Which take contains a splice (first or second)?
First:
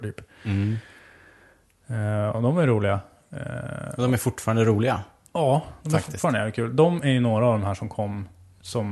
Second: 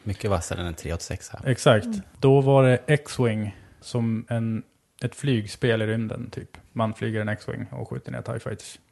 second